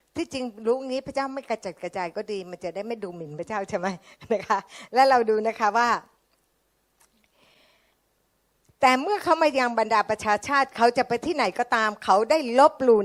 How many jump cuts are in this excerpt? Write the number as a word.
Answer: zero